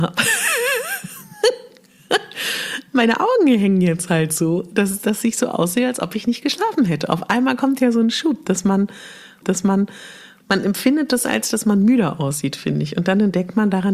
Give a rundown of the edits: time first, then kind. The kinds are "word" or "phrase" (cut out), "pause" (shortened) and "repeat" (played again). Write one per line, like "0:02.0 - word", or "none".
0:09.4 - repeat